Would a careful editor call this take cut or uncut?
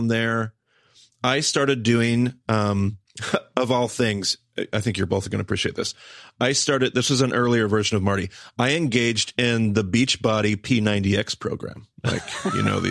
uncut